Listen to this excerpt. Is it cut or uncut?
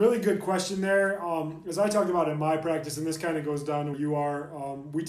cut